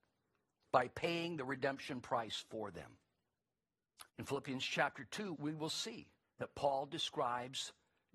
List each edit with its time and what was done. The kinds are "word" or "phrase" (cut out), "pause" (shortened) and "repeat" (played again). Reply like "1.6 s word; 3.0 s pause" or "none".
4.1 s pause; 5.3 s word; 6.2 s pause